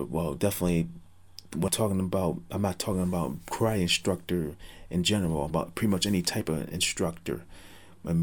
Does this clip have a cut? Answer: yes; 2 cuts; at 1.7 s, 5.5 s

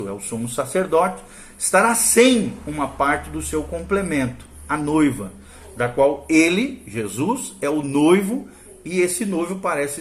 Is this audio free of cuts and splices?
yes; 0 cuts

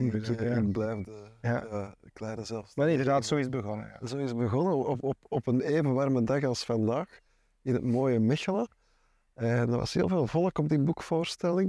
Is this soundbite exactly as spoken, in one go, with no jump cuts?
yes; 0 cuts

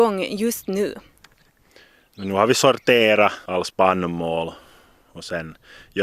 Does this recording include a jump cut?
no; 0 cuts

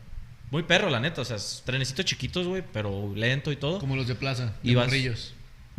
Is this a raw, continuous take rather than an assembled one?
yes; 0 cuts

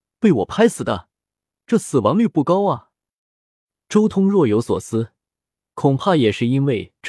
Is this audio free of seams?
yes; 0 cuts

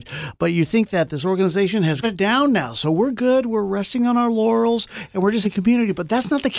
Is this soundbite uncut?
no; 2 cuts; at 2.0 s, 5.4 s

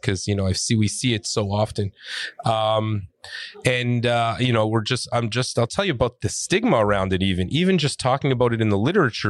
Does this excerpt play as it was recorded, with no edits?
yes; 0 cuts

